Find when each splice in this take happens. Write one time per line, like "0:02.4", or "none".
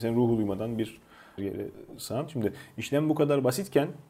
0:01.4